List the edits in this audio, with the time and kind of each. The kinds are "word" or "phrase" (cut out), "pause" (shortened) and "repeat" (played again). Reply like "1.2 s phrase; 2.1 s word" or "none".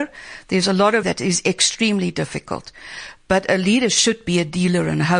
1.0 s word